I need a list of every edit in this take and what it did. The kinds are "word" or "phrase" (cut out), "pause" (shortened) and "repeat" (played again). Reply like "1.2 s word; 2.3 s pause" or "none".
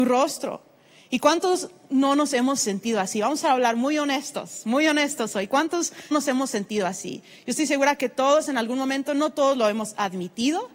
6.1 s word